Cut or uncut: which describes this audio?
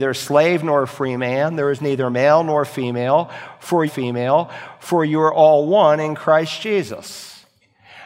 cut